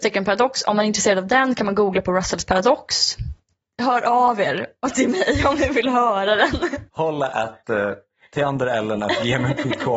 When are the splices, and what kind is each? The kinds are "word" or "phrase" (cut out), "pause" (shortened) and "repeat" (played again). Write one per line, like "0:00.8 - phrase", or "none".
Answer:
none